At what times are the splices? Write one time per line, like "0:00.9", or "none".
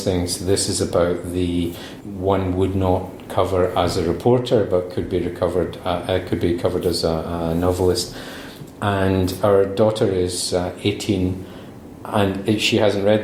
0:02.0